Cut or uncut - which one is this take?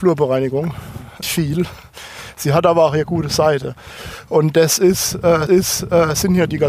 cut